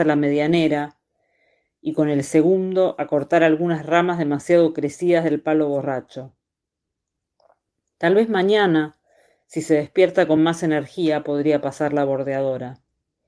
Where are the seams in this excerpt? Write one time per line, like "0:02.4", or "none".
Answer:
none